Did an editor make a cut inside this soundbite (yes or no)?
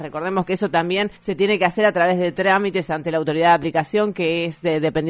yes